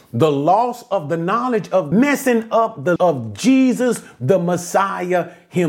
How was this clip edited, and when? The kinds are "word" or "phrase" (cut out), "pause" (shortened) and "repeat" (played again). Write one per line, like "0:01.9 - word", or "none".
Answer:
0:01.9 - phrase
0:03.0 - word

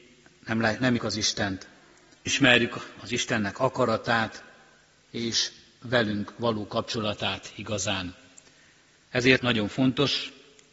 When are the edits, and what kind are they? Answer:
0:01.0 - word
0:02.3 - word
0:09.4 - word

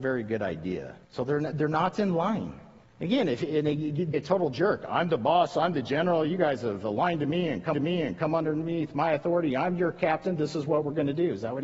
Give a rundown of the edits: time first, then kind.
0:01.0 - pause
0:02.8 - pause
0:04.1 - phrase
0:07.7 - repeat

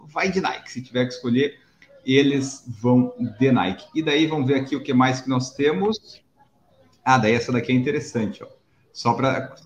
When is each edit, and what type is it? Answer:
none

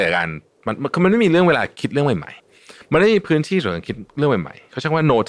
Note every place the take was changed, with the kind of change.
0:02.4 - pause

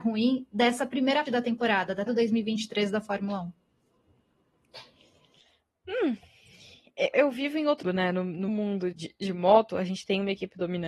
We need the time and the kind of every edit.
0:01.3 - word
0:02.1 - word
0:07.1 - word
0:07.8 - word
0:08.5 - word
0:08.9 - word

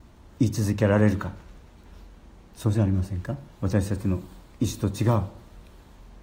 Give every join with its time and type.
0:03.5 - pause

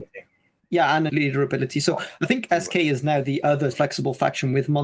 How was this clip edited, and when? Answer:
0:01.1 - word
0:03.7 - word

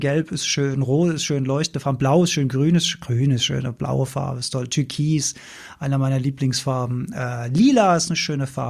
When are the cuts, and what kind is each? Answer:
none

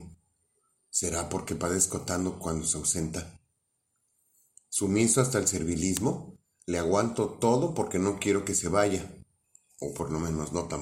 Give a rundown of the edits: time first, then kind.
none

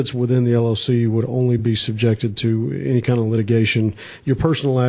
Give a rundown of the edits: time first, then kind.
none

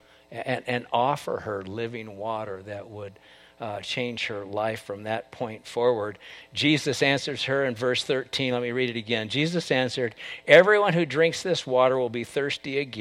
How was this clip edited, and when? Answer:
none

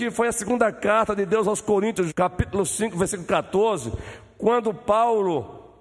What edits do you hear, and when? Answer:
0:02.1 - word

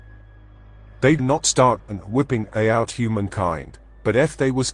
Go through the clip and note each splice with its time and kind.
0:01.2 - word
0:01.8 - word

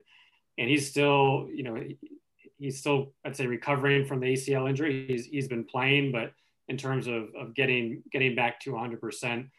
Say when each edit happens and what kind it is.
none

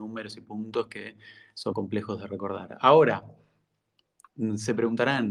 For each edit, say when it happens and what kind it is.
0:01.7 - word

